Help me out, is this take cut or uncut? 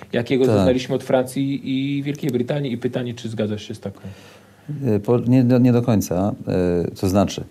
uncut